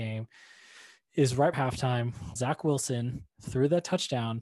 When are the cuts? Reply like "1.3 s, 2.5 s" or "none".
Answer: 1.5 s, 2.4 s, 3.3 s